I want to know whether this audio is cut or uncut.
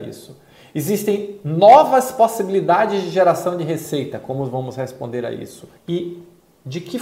cut